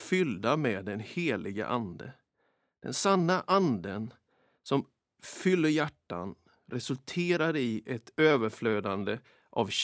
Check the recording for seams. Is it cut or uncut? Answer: uncut